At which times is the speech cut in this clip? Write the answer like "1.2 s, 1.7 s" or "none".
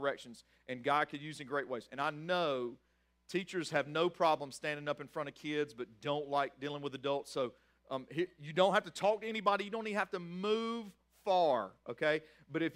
none